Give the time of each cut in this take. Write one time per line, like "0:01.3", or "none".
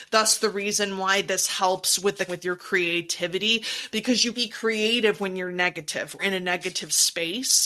0:02.3
0:04.3
0:06.2